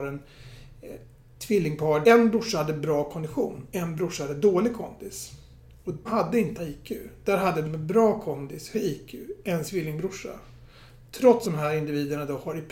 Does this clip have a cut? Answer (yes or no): yes